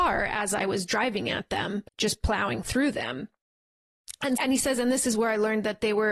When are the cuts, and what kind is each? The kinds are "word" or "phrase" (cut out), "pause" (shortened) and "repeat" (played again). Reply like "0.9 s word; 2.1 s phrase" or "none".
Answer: 1.9 s pause; 4.4 s word